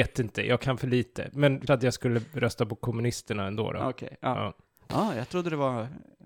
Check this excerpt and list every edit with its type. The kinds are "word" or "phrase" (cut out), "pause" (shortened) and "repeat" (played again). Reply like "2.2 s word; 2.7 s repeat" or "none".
1.7 s word